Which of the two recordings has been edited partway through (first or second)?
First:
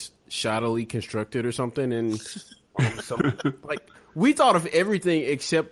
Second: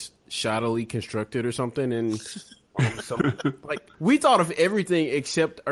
second